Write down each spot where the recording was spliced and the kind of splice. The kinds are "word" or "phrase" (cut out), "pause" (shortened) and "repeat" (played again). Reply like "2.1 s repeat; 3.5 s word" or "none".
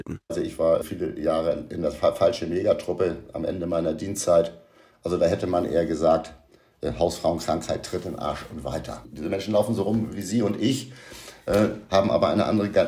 none